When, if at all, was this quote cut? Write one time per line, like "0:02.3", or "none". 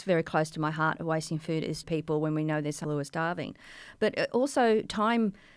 0:01.8
0:02.8